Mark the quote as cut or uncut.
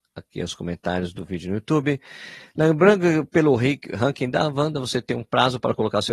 uncut